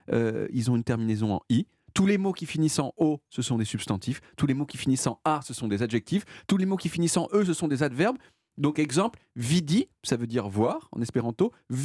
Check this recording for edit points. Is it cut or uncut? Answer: uncut